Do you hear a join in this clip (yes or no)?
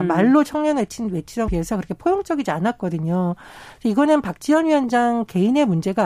yes